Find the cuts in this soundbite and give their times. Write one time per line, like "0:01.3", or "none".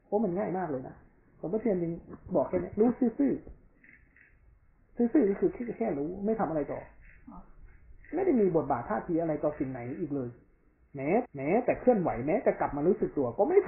0:11.3